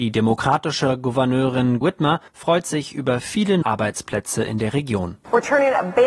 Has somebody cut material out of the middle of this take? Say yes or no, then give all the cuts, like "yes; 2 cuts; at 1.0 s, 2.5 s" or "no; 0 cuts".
yes; 3 cuts; at 1.8 s, 2.3 s, 3.6 s